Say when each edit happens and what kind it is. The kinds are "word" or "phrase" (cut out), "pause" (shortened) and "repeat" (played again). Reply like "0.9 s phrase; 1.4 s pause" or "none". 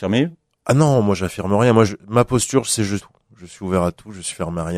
1.9 s word; 3.0 s phrase

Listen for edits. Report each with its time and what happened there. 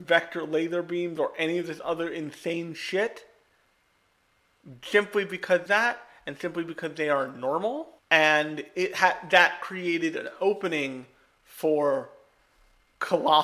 5.7 s phrase; 8.0 s pause

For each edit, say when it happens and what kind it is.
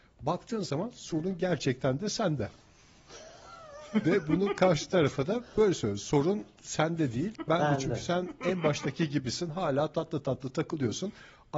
none

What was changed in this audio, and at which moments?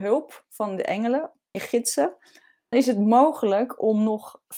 1.5 s word; 2.7 s word

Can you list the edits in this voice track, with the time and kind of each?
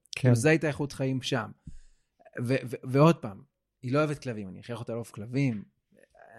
none

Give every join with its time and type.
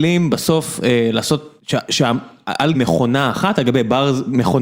1.6 s pause; 2.7 s word

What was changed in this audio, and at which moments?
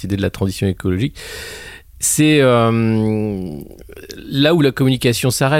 none

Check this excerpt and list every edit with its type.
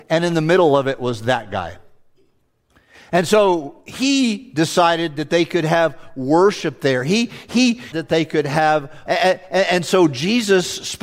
7.9 s word; 9.1 s word

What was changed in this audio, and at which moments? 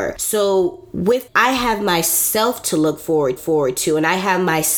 1.3 s phrase; 3.4 s repeat

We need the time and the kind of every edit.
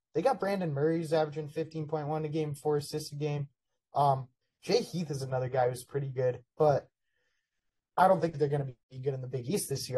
4.4 s pause; 6.5 s pause; 8.8 s pause

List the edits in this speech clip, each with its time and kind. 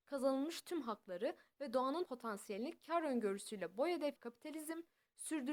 2.0 s word; 4.2 s word

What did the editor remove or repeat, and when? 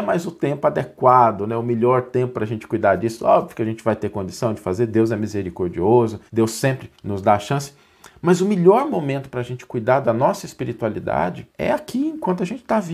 6.3 s pause; 6.9 s pause; 11.5 s pause

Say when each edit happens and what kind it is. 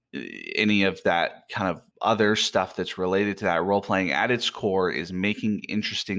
1.9 s pause

